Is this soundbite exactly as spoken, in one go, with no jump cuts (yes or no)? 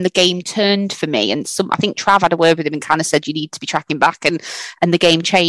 yes